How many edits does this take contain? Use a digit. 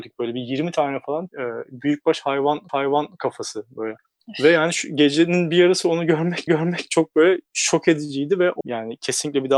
5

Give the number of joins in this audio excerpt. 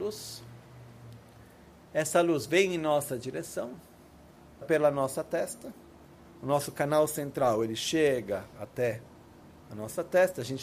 1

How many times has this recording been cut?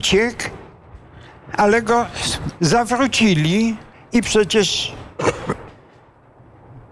1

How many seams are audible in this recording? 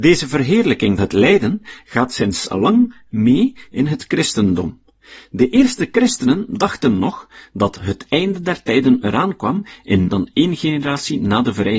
2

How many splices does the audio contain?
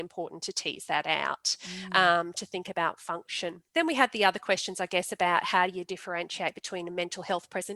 1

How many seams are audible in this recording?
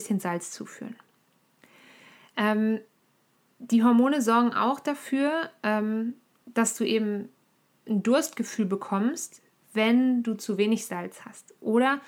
0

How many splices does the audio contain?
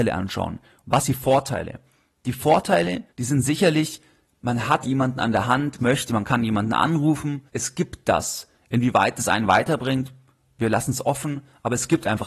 5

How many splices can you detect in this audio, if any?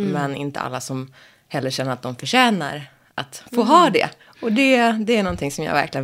0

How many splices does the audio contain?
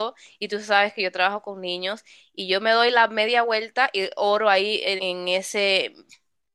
1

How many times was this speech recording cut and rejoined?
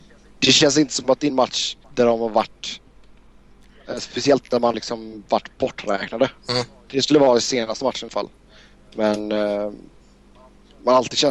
6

